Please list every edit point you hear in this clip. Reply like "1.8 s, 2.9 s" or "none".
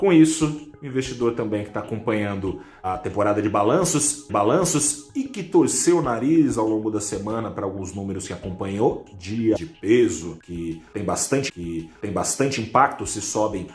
4.3 s, 9.6 s, 11.5 s